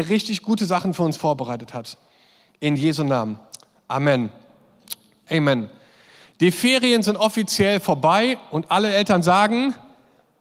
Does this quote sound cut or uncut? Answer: uncut